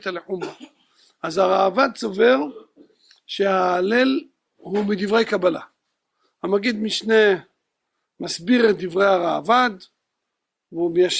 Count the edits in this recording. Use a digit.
0